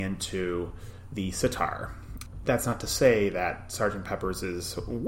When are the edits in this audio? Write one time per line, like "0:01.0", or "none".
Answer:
0:02.5

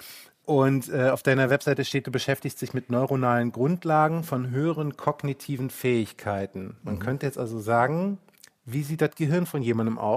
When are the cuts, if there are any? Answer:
none

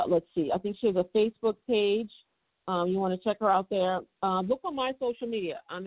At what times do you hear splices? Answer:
none

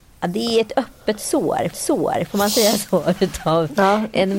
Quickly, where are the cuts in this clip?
0:01.7

